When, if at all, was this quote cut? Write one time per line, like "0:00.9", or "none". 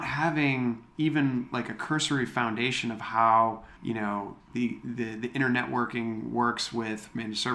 0:03.8
0:04.4